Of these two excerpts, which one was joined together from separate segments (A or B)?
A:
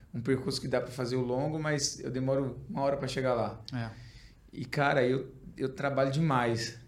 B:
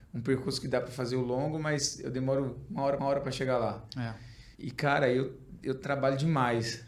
B